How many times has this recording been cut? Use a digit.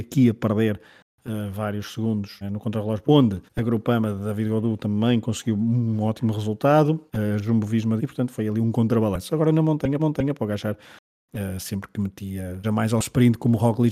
7